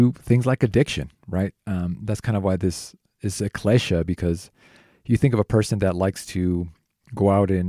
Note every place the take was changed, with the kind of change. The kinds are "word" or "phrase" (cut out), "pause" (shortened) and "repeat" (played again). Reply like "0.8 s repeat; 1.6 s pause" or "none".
none